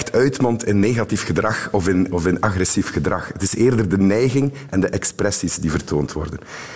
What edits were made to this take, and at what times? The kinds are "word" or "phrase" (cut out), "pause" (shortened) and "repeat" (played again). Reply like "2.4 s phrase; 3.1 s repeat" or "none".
none